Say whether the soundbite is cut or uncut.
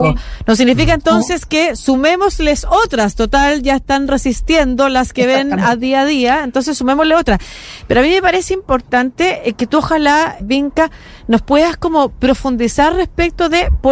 cut